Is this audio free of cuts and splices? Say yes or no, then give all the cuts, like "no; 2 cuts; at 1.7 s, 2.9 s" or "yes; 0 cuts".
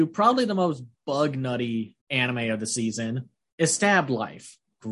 no; 2 cuts; at 2.0 s, 3.4 s